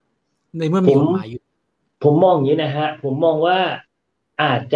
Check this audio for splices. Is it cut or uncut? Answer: uncut